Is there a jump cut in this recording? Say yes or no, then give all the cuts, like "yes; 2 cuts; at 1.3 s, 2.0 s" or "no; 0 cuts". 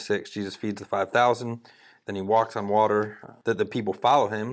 no; 0 cuts